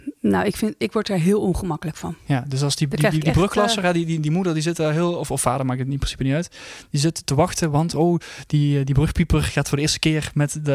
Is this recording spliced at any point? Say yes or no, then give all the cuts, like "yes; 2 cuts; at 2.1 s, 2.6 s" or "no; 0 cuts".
no; 0 cuts